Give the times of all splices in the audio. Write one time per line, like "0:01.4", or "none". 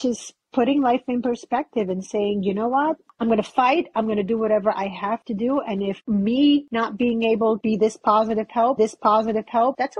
0:07.6
0:08.8